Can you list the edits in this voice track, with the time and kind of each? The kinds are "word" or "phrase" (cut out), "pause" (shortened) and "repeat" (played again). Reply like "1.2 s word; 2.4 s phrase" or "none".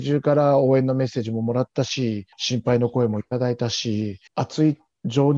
2.3 s pause; 4.3 s pause